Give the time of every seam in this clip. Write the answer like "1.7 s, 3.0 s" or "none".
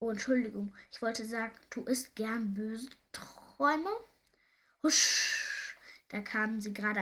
none